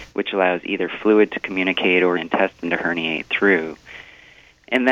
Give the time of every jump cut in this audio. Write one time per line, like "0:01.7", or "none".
0:02.1